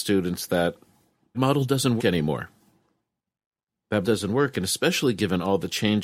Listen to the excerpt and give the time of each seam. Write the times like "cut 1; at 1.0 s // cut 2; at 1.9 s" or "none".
cut 1; at 1.3 s // cut 2; at 2.0 s // cut 3; at 4.0 s